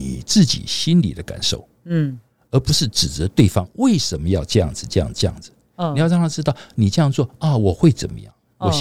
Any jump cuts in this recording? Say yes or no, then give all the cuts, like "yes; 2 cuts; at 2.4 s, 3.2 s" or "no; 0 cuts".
no; 0 cuts